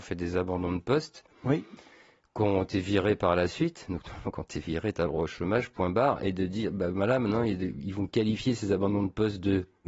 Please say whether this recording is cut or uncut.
uncut